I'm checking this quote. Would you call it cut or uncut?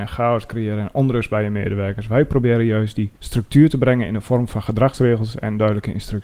cut